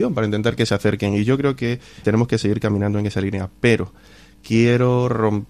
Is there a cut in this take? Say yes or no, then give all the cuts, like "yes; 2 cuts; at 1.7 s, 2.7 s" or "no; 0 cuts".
yes; 1 cut; at 2.0 s